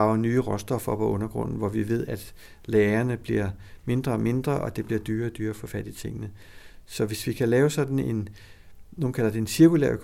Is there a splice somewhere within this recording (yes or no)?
no